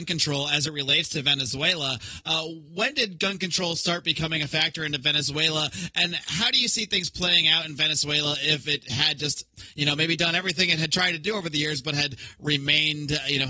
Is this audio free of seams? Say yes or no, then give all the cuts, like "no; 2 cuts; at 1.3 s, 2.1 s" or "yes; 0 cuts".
yes; 0 cuts